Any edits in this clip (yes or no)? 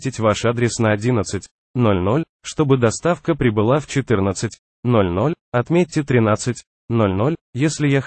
no